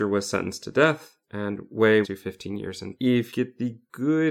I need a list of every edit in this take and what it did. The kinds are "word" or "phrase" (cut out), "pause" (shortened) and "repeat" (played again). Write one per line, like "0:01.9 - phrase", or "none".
0:01.2 - pause
0:02.0 - phrase
0:02.9 - word
0:03.3 - word